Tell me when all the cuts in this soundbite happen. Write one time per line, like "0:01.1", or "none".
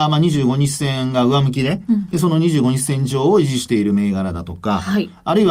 none